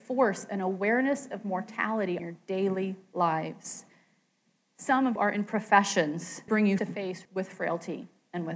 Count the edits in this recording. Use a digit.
5